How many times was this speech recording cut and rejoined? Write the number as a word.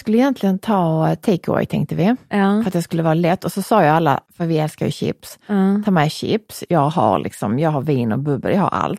one